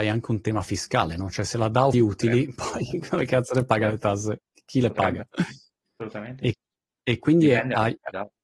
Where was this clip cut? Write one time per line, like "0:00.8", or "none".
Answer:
0:01.9